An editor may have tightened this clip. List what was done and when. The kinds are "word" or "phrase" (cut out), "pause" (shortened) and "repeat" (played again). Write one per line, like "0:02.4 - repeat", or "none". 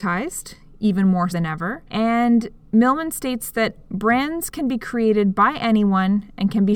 0:01.3 - word
0:01.9 - pause